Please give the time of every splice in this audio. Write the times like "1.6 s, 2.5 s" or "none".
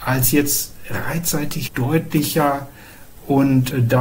1.7 s